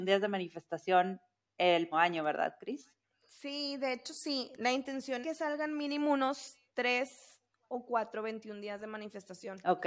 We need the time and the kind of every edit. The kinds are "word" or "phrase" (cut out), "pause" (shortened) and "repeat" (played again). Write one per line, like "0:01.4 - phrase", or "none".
0:01.9 - word
0:05.2 - word